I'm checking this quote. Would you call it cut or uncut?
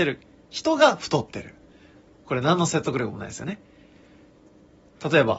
uncut